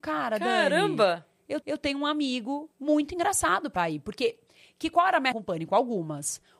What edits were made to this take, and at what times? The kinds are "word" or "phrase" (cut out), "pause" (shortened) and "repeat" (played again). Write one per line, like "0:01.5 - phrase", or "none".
0:01.6 - repeat
0:02.7 - pause
0:03.8 - word
0:05.3 - word

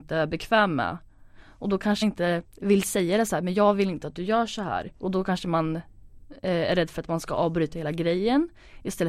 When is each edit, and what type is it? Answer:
0:02.0 - word

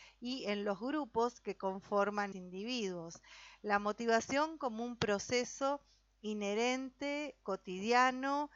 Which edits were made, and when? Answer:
0:02.3 - word

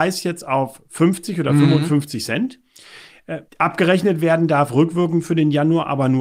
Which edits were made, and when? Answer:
0:03.5 - pause

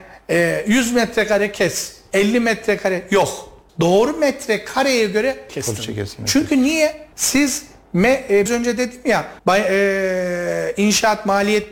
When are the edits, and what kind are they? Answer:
0:03.7 - pause
0:05.5 - word
0:07.1 - pause
0:08.5 - word
0:09.4 - pause

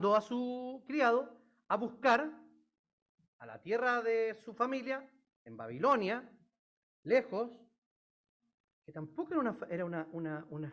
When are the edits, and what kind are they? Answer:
none

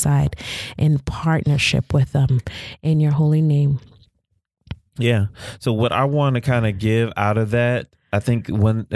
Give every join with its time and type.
0:04.9 - pause

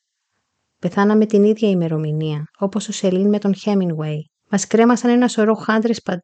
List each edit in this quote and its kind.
0:02.5 - pause
0:04.4 - pause

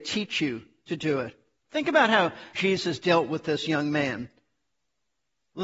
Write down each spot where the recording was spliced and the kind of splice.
0:01.6 - pause

